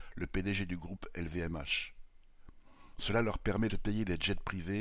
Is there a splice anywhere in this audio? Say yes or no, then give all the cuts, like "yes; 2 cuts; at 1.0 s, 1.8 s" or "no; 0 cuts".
yes; 1 cut; at 3.7 s